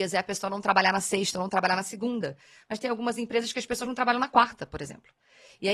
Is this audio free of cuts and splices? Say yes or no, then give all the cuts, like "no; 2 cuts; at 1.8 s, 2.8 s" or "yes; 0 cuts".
yes; 0 cuts